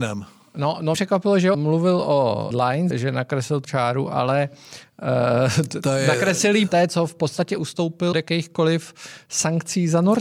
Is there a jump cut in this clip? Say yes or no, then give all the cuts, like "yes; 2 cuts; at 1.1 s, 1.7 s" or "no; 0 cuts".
yes; 7 cuts; at 0.9 s, 1.5 s, 2.5 s, 2.9 s, 3.6 s, 6.7 s, 8.1 s